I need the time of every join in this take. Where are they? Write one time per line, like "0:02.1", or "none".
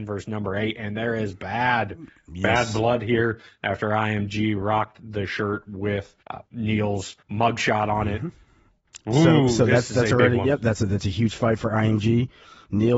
0:06.2
0:07.2